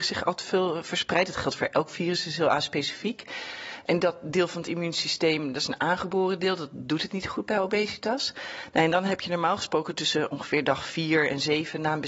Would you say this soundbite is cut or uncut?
uncut